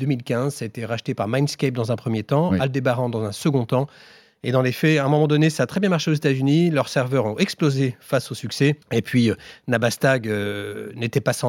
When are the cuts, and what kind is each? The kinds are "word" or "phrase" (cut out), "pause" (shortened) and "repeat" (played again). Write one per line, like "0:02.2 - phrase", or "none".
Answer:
0:08.8 - pause